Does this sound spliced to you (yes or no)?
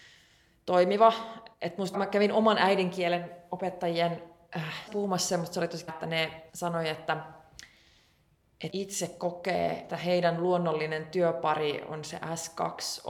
yes